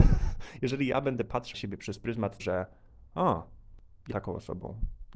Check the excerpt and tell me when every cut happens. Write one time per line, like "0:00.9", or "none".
0:01.5
0:02.4
0:04.1